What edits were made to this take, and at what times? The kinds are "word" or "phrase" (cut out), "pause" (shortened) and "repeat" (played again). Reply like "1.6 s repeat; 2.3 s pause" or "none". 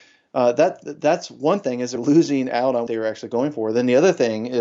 2.0 s word; 2.9 s word